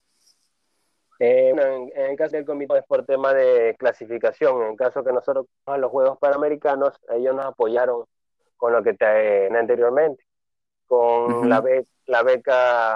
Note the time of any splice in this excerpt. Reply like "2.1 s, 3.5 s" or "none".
1.5 s, 2.3 s, 2.7 s, 5.7 s, 9.5 s